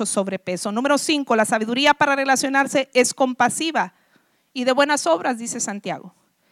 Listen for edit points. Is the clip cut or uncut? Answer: uncut